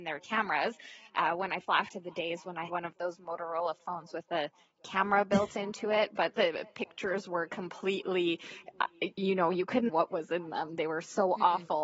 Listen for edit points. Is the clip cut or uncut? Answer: cut